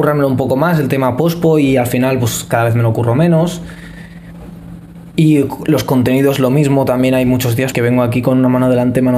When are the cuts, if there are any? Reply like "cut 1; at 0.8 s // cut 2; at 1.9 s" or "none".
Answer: cut 1; at 7.7 s